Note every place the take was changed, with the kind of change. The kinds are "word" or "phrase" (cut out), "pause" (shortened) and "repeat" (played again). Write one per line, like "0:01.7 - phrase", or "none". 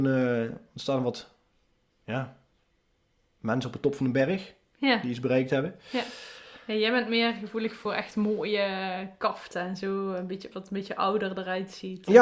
none